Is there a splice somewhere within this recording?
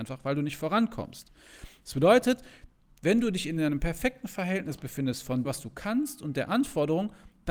yes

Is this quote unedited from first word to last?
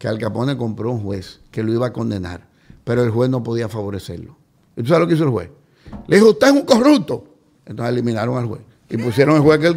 yes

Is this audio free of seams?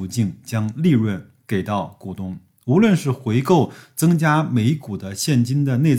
yes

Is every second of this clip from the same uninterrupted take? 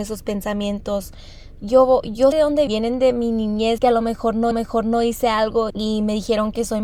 no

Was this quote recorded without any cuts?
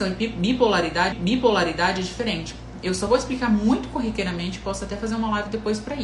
no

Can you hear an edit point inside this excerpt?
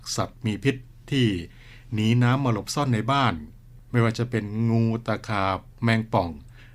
no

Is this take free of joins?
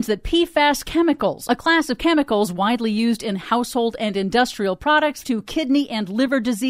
no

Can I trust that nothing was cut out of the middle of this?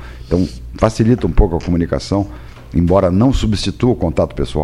yes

